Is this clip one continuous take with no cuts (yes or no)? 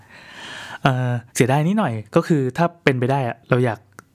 no